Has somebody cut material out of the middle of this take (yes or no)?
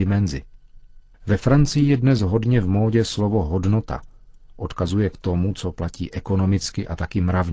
no